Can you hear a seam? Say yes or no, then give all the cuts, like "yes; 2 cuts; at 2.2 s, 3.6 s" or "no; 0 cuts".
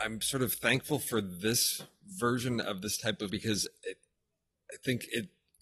yes; 1 cut; at 3.3 s